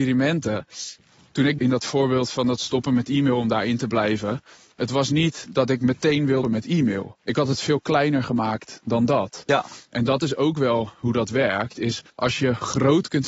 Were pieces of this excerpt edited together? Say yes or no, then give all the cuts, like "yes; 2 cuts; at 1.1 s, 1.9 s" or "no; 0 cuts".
yes; 4 cuts; at 1.6 s, 6.4 s, 7.2 s, 12.1 s